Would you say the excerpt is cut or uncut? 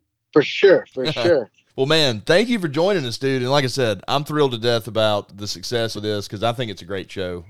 cut